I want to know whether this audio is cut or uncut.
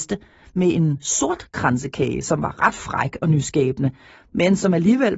uncut